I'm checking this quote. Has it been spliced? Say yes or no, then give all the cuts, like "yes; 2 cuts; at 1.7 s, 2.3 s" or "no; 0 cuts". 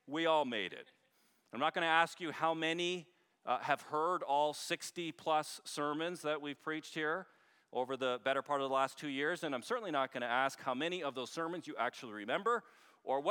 no; 0 cuts